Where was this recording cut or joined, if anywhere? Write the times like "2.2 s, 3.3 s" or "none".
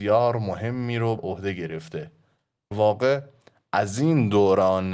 1.2 s, 2.7 s

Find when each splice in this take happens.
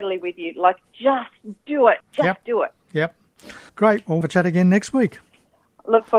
2.0 s, 3.7 s, 4.2 s

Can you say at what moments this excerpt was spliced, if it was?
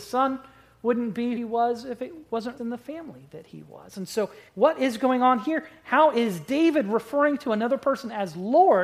1.4 s, 2.6 s, 4.5 s

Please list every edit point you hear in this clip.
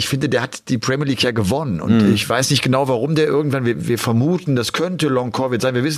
none

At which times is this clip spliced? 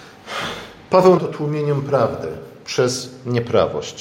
1.2 s

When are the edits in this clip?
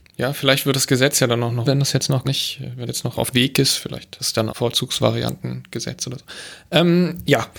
1.6 s, 2.2 s, 2.9 s, 3.3 s, 4.2 s, 4.5 s

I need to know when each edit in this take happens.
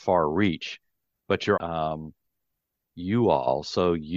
1.6 s

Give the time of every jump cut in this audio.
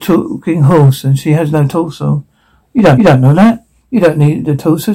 3.0 s

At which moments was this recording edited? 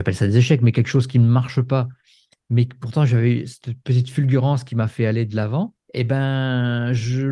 5.8 s

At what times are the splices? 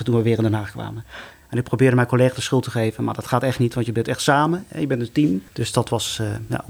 5.5 s

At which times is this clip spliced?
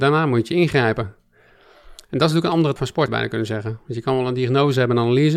2.8 s, 3.1 s

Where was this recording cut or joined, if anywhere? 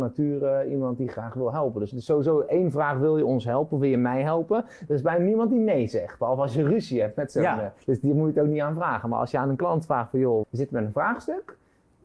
1.9 s, 7.8 s, 10.4 s

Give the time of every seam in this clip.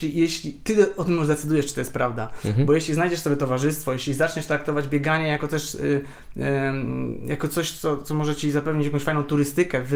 none

